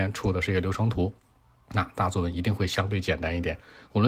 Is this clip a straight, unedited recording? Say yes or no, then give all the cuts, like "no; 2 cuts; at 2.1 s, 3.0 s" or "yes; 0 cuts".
yes; 0 cuts